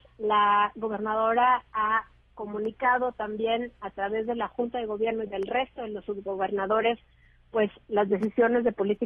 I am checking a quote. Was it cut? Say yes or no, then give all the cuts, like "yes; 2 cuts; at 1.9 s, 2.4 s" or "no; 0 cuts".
no; 0 cuts